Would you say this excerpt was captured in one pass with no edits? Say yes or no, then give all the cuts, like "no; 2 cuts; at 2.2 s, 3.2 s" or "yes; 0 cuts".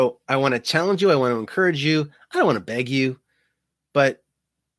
yes; 0 cuts